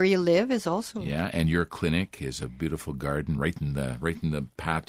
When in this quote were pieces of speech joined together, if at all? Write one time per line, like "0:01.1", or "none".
none